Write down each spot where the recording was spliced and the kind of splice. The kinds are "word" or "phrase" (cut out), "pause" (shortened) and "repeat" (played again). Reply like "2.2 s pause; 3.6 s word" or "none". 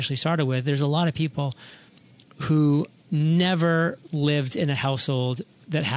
none

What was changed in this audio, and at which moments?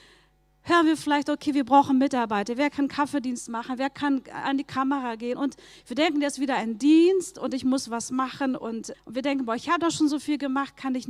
8.9 s word

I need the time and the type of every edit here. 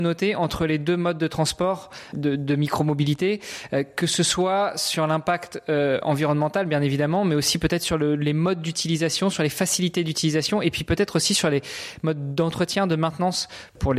none

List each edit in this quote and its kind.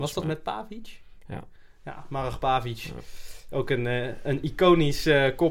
none

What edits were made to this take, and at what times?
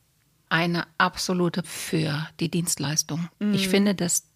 1.6 s word; 3.3 s pause

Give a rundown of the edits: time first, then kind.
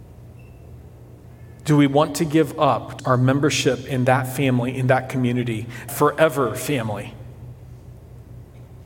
3.0 s phrase; 5.9 s word

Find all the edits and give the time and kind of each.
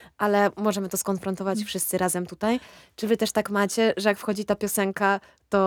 none

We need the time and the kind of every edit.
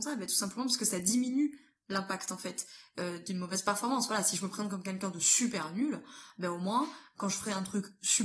none

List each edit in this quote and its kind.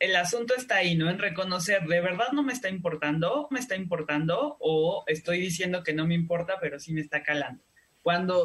3.5 s repeat

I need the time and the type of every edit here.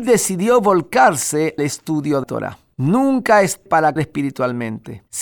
1.6 s word; 2.2 s word; 3.7 s word; 4.0 s word

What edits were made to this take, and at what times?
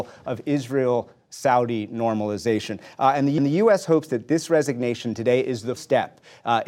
3.4 s repeat; 5.8 s word

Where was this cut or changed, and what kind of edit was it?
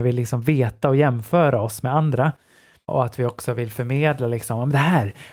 none

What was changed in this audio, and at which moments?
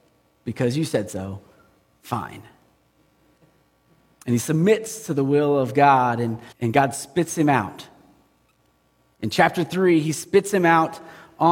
6.5 s pause

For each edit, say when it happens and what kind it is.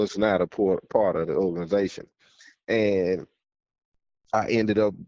none

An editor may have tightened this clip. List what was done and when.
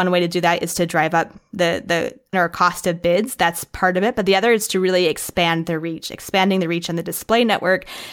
2.3 s word

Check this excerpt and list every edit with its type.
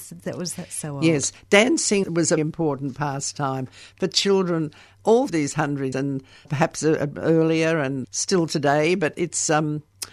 2.0 s word; 2.4 s word; 5.3 s word; 5.9 s word; 6.4 s word; 8.0 s word

